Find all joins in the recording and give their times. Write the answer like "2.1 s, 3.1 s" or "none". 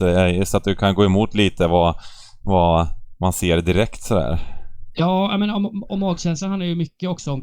none